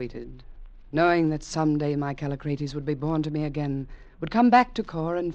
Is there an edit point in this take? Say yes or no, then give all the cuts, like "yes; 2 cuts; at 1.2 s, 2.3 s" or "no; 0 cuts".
no; 0 cuts